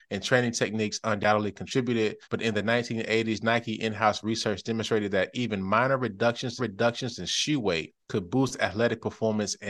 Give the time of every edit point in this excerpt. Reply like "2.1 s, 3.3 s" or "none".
2.2 s, 6.6 s, 8.0 s